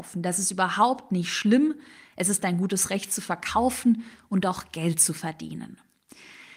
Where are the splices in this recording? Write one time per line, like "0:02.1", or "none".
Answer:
none